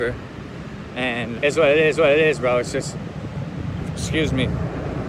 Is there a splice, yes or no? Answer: yes